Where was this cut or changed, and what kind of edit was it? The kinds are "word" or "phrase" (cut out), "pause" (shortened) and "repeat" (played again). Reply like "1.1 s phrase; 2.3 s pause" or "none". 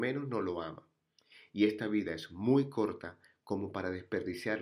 none